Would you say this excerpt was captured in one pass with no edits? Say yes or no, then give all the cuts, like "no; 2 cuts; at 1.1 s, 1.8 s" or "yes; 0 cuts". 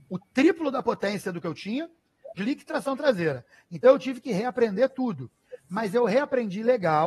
no; 1 cut; at 2.4 s